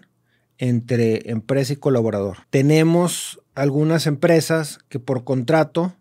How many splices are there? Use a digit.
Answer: 1